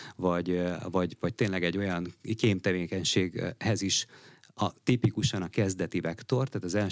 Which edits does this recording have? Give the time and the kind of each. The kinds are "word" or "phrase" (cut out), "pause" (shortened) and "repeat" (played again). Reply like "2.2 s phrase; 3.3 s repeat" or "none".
none